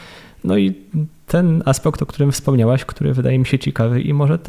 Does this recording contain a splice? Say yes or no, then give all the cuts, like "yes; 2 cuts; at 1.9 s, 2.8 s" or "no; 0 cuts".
no; 0 cuts